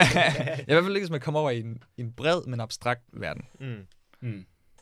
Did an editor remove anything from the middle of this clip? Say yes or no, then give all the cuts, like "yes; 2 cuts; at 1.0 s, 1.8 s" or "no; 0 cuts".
yes; 1 cut; at 3.1 s